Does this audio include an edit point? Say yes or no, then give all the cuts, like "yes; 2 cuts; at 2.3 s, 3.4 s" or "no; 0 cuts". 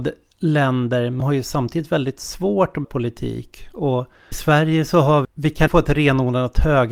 yes; 5 cuts; at 1.2 s, 2.8 s, 4.3 s, 5.2 s, 5.7 s